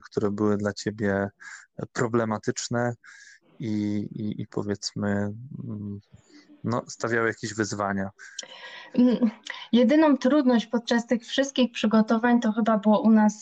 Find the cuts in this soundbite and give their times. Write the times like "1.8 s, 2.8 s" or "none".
none